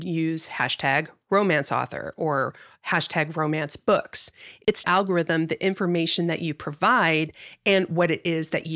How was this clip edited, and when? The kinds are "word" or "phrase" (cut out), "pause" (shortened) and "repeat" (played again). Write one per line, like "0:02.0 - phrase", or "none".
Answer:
0:04.8 - phrase